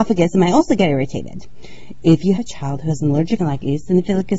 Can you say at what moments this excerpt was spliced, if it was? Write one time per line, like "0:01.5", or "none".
0:02.4
0:03.4